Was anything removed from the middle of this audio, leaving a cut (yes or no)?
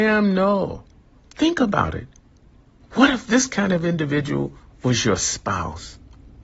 no